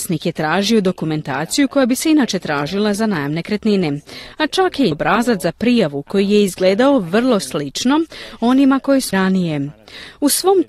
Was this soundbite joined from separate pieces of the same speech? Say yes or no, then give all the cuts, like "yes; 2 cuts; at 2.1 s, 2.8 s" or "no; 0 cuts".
yes; 2 cuts; at 4.9 s, 9.1 s